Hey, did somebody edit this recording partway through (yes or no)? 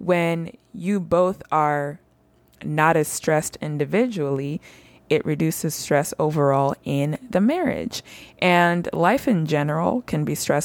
no